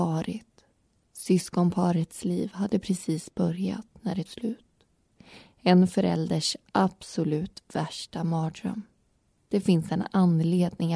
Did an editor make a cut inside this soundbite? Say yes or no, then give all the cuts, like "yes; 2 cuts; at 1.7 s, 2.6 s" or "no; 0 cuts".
yes; 1 cut; at 4.3 s